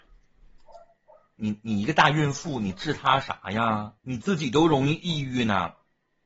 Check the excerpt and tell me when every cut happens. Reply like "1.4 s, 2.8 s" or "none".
4.0 s